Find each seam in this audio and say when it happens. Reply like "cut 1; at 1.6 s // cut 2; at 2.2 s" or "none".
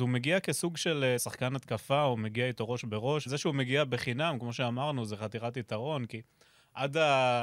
cut 1; at 1.2 s // cut 2; at 3.3 s

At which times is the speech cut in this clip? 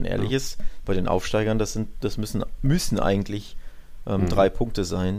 none

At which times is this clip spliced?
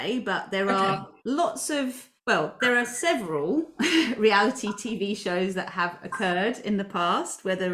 cut 1; at 1.2 s // cut 2; at 2.2 s

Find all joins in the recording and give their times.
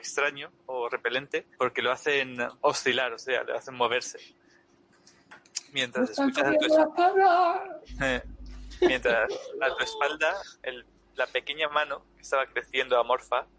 cut 1; at 1.5 s // cut 2; at 2.6 s // cut 3; at 10.6 s

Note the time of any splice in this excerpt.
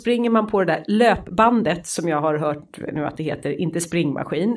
none

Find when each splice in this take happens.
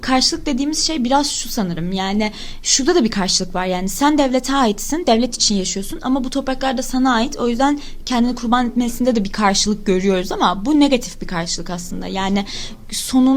none

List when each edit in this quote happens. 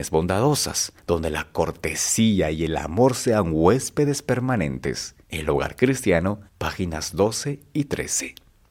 cut 1; at 1.0 s // cut 2; at 5.2 s // cut 3; at 6.5 s

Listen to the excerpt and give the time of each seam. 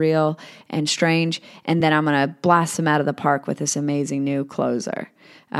none

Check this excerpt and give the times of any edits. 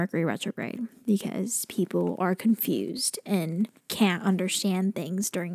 cut 1; at 3.8 s

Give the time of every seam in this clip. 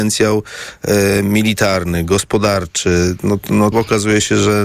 cut 1; at 3.7 s

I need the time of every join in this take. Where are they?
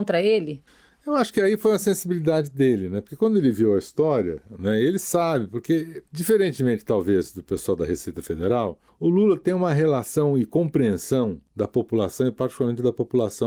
cut 1; at 6.1 s

